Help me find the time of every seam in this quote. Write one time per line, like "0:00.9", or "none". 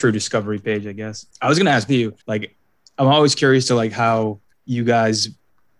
0:01.3
0:01.9
0:02.2
0:04.5